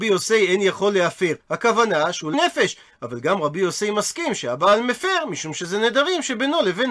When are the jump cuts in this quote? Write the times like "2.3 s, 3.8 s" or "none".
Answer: 1.4 s, 2.3 s